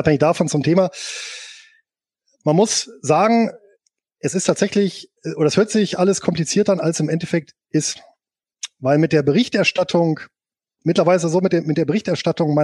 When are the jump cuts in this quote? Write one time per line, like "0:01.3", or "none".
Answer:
none